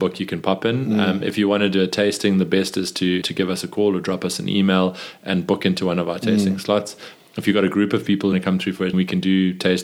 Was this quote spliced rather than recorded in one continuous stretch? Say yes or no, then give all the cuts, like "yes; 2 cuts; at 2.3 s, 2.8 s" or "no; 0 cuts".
yes; 3 cuts; at 3.2 s, 8.3 s, 8.9 s